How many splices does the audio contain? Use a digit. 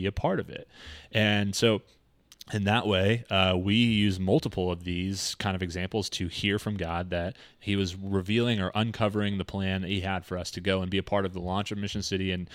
0